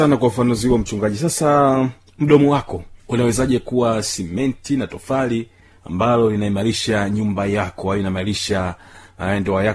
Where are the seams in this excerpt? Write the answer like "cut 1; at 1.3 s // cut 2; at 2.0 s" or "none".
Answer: none